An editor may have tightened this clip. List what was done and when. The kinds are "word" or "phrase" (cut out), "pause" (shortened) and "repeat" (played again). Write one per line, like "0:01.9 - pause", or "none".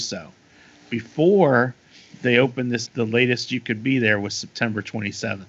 0:02.9 - word